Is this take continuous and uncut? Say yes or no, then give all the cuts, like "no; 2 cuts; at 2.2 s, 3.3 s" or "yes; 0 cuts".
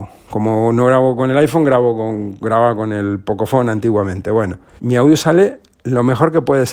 no; 1 cut; at 4.8 s